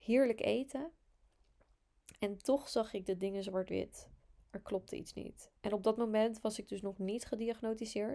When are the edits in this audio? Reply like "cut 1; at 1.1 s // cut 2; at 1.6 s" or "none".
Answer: cut 1; at 5.6 s